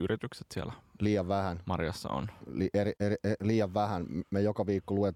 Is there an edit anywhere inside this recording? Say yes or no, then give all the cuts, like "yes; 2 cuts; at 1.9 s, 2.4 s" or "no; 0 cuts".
no; 0 cuts